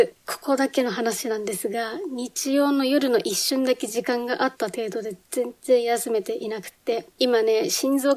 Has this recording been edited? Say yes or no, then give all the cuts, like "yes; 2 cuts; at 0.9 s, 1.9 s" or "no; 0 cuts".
yes; 1 cut; at 7.1 s